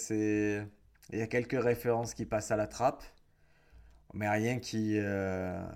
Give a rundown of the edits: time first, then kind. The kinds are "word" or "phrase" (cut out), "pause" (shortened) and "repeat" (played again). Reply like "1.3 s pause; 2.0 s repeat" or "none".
none